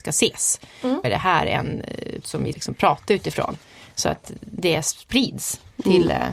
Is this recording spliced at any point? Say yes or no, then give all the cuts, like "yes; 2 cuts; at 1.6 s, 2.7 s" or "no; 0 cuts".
yes; 3 cuts; at 1.0 s, 2.2 s, 2.5 s